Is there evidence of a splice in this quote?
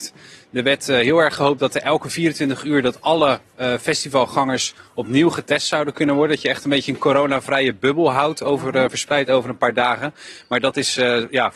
no; 0 cuts

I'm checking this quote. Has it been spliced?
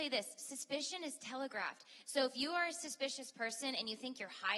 no; 0 cuts

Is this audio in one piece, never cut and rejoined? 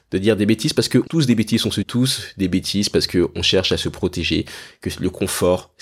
no; 2 cuts; at 1.1 s, 1.8 s

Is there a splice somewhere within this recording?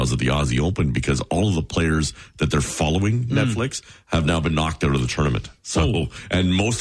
no; 0 cuts

